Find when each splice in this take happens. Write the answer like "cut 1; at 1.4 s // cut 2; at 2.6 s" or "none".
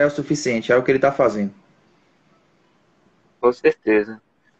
none